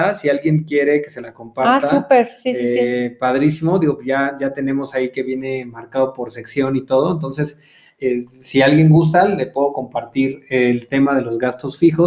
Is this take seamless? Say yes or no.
yes